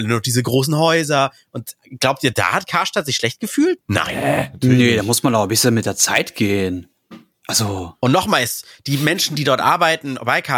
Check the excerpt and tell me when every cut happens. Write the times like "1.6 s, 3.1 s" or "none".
none